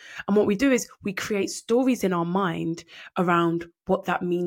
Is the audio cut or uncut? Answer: uncut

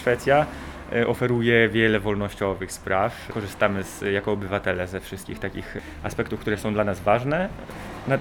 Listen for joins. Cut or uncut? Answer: uncut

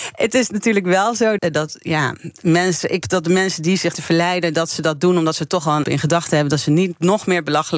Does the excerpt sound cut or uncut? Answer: cut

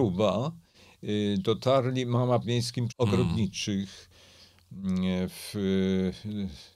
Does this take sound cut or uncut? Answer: cut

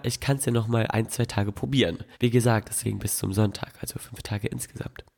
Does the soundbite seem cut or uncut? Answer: cut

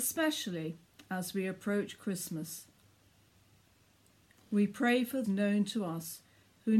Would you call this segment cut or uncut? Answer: cut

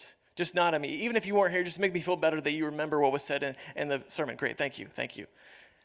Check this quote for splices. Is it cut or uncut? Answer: uncut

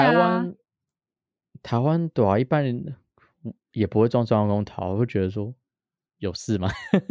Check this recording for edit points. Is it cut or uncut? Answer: uncut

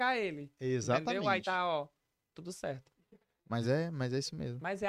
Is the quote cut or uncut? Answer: uncut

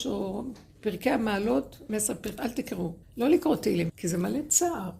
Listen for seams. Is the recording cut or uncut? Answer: cut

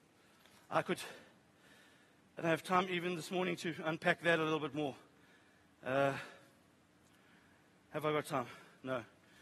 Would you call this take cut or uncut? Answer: uncut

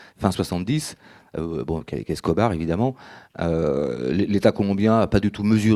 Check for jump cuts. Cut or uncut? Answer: uncut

